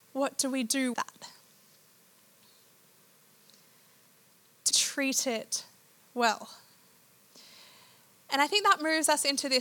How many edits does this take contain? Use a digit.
2